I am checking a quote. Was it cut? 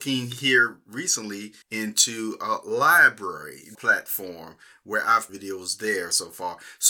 yes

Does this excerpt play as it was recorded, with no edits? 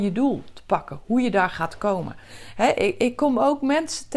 yes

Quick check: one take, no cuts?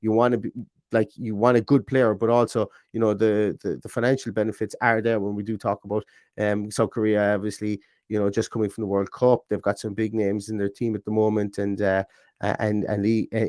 yes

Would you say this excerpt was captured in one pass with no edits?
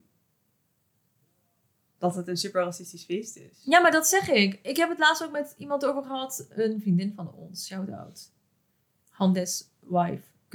yes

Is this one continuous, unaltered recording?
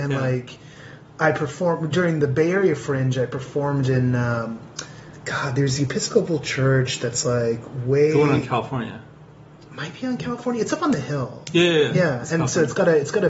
yes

